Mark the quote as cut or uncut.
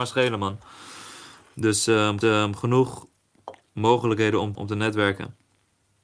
cut